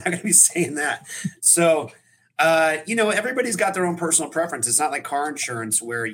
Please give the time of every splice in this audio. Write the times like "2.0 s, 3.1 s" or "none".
none